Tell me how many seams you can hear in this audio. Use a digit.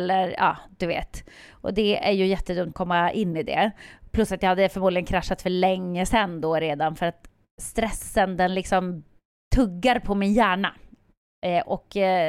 1